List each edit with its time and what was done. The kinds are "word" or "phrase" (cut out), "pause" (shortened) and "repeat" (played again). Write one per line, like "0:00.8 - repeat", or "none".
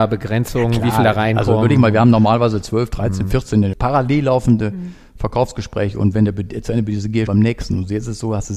0:03.7 - phrase
0:07.3 - word

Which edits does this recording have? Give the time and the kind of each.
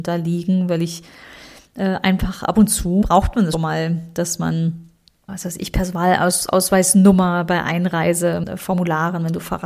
0:03.0 - word
0:03.5 - word
0:05.3 - word

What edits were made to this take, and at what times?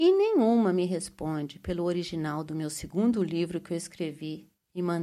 none

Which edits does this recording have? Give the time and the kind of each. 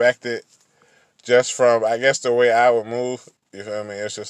none

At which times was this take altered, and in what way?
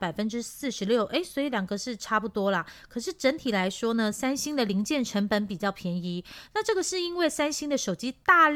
none

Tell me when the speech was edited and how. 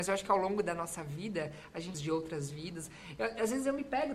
0:01.9 - phrase

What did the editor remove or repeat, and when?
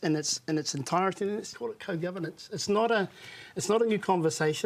0:01.5 - word

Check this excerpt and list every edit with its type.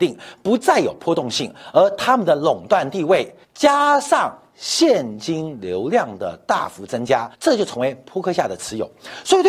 0:03.4 - pause
0:07.3 - pause

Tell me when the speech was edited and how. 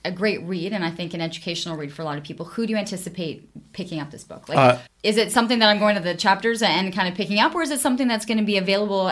0:04.9 - pause

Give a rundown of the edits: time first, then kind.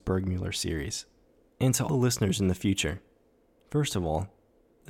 0:01.3 - pause
0:01.9 - word

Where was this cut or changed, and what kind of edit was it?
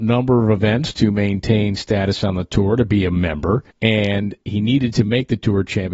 0:03.7 - pause

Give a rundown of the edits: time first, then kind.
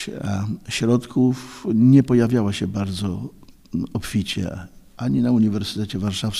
none

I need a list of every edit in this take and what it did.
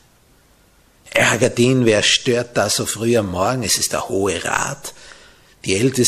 none

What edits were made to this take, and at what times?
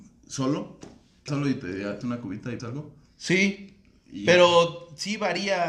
0:01.3 - word
0:02.0 - word
0:02.6 - word

